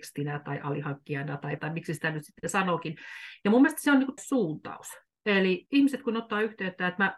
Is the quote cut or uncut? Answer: cut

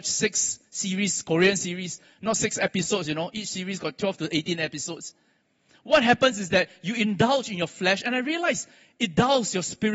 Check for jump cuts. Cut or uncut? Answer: uncut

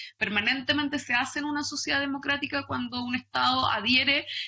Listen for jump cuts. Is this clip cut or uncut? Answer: uncut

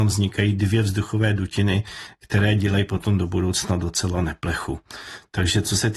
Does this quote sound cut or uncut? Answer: uncut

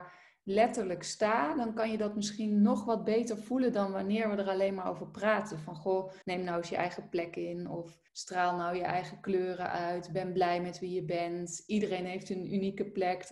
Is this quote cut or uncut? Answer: cut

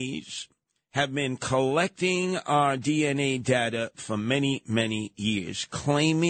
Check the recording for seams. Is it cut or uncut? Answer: cut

